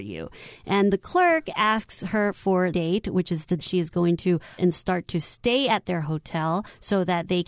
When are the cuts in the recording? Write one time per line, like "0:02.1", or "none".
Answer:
0:02.7
0:03.6
0:04.6

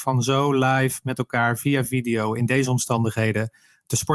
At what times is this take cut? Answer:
none

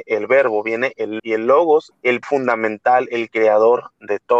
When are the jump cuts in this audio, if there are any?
0:01.2
0:01.9
0:02.2

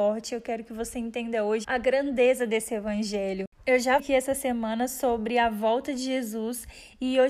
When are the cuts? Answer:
0:01.6
0:04.0

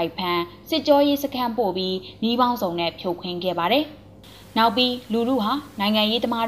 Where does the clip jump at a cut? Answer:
none

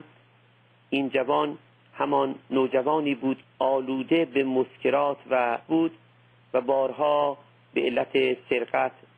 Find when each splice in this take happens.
0:03.4
0:05.7

